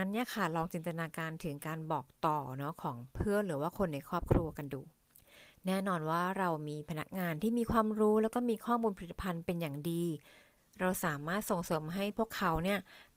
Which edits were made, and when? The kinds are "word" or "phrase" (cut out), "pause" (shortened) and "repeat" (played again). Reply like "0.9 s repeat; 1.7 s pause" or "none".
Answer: 5.1 s pause